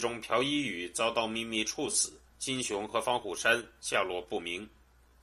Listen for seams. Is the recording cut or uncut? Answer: cut